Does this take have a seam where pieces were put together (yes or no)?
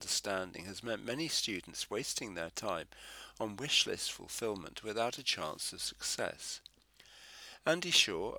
no